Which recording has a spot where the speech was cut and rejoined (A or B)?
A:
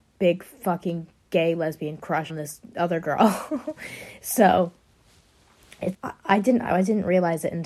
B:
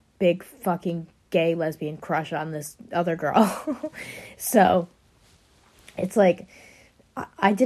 A